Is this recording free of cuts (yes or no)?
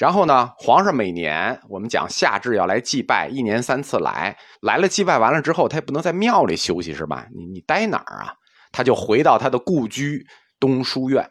no